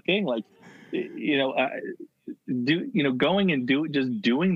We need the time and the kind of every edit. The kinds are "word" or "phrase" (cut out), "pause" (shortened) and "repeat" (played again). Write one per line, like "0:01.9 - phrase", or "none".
none